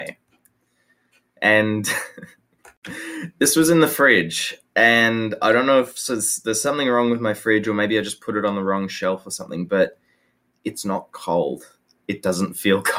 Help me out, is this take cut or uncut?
uncut